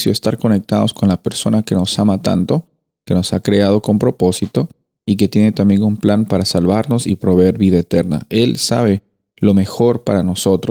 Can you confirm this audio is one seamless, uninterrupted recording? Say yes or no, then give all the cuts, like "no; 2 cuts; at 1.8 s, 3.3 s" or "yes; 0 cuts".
yes; 0 cuts